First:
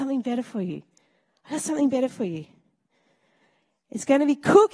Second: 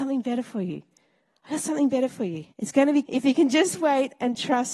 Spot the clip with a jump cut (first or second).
second